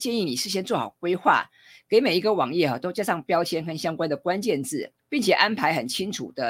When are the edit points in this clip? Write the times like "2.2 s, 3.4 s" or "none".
5.0 s